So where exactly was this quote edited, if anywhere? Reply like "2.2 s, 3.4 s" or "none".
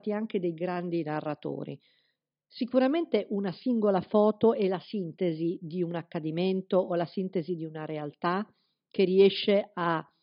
none